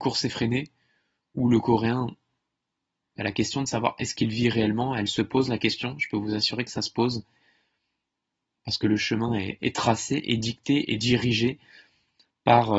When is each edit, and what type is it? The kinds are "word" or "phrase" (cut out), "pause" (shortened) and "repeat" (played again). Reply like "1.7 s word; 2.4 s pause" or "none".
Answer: none